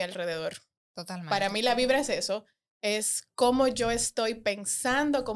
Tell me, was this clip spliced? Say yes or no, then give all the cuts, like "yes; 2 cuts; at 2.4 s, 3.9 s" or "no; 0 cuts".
no; 0 cuts